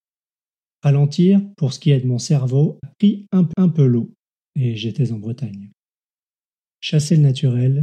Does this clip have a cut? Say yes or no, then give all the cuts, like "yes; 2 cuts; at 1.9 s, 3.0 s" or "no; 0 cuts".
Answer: yes; 2 cuts; at 2.8 s, 3.5 s